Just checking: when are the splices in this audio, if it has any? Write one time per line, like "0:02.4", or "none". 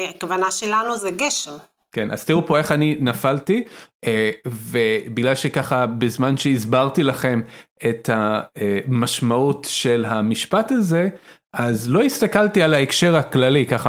none